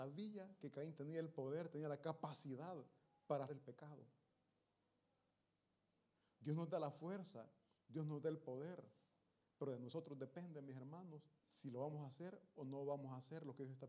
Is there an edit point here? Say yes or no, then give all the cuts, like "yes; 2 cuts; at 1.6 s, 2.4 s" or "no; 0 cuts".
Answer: yes; 2 cuts; at 3.5 s, 11.4 s